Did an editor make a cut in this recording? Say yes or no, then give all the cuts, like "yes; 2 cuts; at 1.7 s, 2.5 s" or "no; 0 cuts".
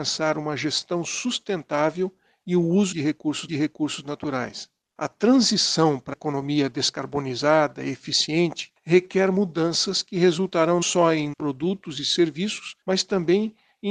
yes; 6 cuts; at 2.9 s, 3.5 s, 6.1 s, 10.8 s, 11.3 s, 12.8 s